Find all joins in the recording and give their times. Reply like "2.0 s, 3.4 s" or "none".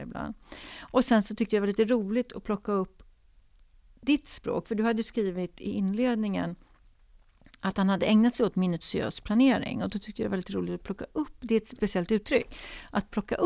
11.8 s